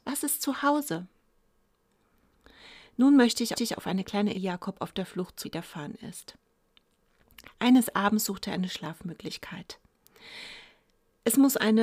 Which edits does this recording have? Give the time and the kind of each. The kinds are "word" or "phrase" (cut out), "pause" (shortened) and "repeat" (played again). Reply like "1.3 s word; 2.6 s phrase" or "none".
3.6 s repeat; 4.3 s phrase; 5.4 s word